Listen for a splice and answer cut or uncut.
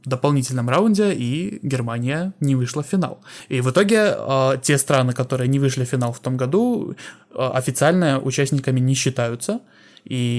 uncut